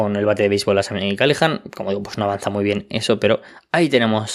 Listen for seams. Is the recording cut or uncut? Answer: uncut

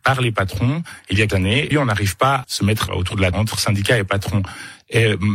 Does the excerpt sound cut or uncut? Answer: cut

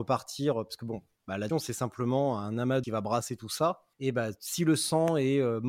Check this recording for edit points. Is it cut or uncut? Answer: cut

